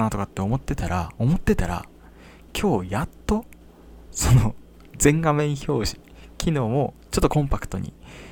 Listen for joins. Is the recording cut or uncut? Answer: uncut